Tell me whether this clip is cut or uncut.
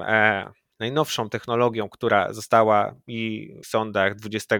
cut